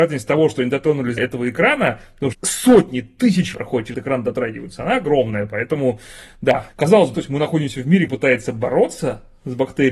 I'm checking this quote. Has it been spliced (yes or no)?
yes